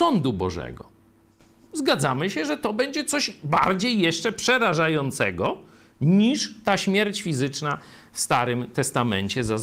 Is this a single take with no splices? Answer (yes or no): yes